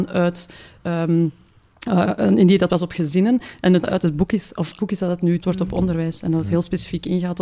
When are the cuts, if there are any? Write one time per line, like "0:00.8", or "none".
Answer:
0:02.7
0:03.8
0:04.8
0:05.4